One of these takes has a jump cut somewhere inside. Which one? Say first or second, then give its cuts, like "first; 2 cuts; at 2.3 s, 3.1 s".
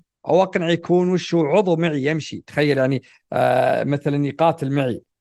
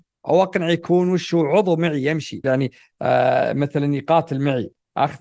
second; 1 cut; at 2.4 s